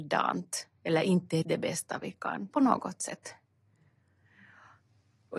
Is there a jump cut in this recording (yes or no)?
yes